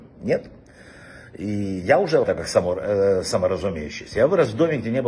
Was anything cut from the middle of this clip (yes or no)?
yes